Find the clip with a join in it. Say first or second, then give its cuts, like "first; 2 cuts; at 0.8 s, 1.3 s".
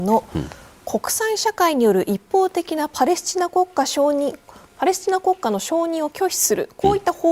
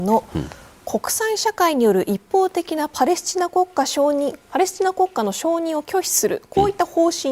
second; 1 cut; at 4.4 s